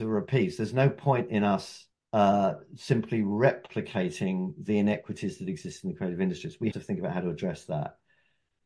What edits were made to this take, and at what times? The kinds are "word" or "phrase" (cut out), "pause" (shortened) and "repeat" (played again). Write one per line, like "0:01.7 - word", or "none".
0:01.9 - pause
0:06.7 - word